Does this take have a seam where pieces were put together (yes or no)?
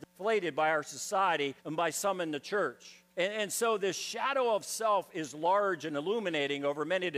yes